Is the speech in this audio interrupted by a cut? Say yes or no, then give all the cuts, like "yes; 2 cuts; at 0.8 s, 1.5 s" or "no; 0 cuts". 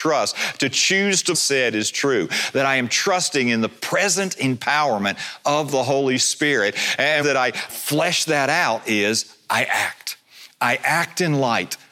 yes; 3 cuts; at 1.3 s, 7.2 s, 7.7 s